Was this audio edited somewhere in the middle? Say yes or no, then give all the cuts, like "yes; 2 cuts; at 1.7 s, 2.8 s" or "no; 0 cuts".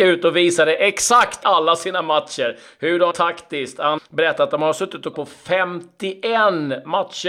yes; 4 cuts; at 1.4 s, 3.1 s, 4.0 s, 5.1 s